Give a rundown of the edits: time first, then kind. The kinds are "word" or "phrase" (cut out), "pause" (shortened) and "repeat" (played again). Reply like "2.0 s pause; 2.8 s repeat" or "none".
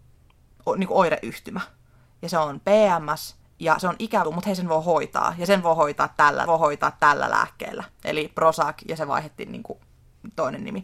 3.4 s pause; 4.2 s word; 6.5 s repeat